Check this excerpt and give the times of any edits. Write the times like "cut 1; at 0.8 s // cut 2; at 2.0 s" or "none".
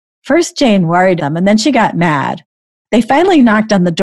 cut 1; at 1.2 s

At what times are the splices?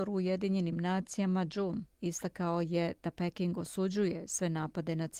cut 1; at 1.5 s // cut 2; at 1.9 s

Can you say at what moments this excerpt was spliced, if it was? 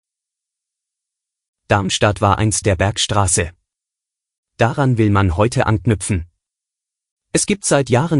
cut 1; at 2.6 s

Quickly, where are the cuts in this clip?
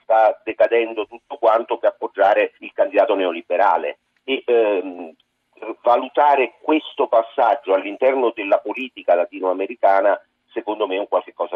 cut 1; at 1.8 s // cut 2; at 2.6 s

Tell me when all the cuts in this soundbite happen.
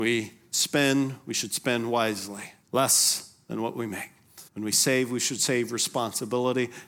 cut 1; at 2.6 s // cut 2; at 4.5 s

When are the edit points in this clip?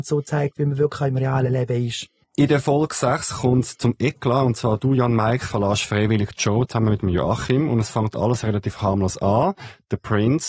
none

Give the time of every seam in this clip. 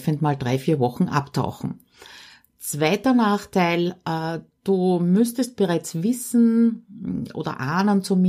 none

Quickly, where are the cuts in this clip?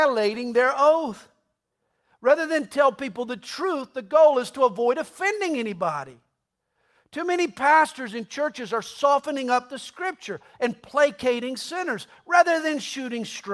none

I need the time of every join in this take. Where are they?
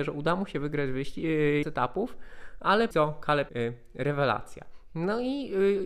cut 1; at 1.6 s // cut 2; at 2.9 s // cut 3; at 3.5 s

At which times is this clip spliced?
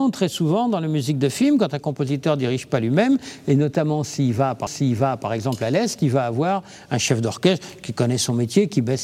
cut 1; at 4.7 s

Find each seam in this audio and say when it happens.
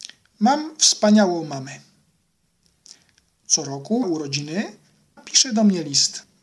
cut 1; at 4.0 s // cut 2; at 5.2 s

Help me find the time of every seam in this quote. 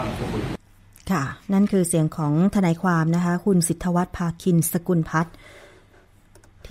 none

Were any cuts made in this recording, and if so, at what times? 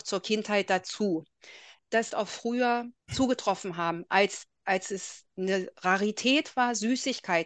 cut 1; at 2.1 s // cut 2; at 3.0 s // cut 3; at 5.3 s

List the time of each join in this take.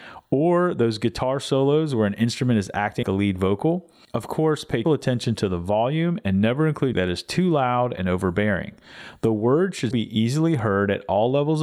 cut 1; at 3.0 s // cut 2; at 4.8 s // cut 3; at 6.9 s // cut 4; at 9.9 s

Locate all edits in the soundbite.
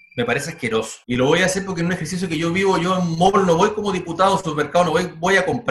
cut 1; at 1.0 s

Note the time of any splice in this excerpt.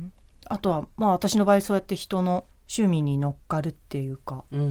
cut 1; at 2.5 s

